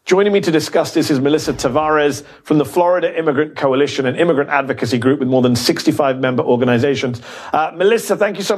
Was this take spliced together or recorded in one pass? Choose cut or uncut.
uncut